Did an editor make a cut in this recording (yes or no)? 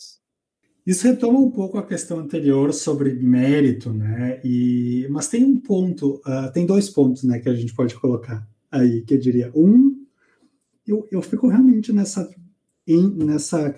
no